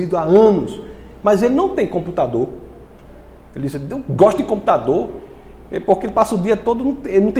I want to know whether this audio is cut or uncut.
uncut